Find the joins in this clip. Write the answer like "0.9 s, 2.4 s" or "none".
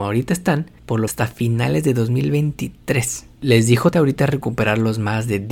1.1 s, 3.9 s